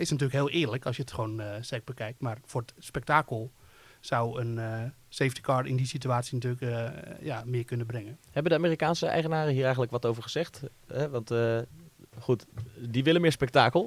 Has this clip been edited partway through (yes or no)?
no